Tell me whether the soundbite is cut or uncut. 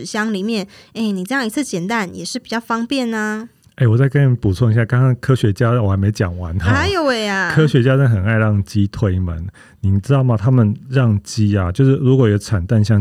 uncut